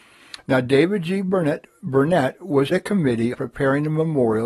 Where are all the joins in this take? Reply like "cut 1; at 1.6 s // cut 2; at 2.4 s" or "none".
cut 1; at 2.7 s // cut 2; at 3.3 s